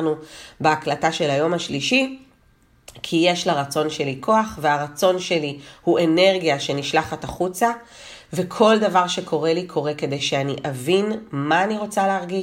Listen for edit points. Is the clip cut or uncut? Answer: uncut